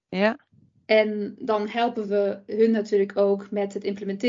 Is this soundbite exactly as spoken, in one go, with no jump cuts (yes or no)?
yes